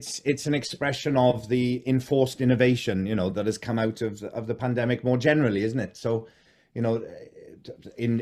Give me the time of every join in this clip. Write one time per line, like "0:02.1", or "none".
none